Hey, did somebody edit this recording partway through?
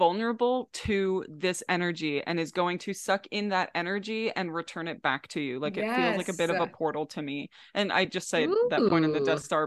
no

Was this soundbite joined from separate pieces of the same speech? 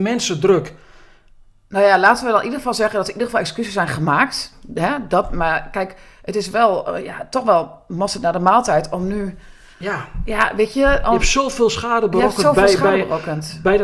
no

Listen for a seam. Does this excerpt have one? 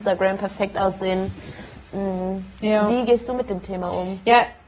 no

